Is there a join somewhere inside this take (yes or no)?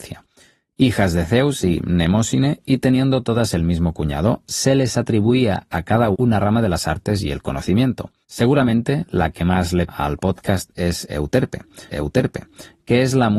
yes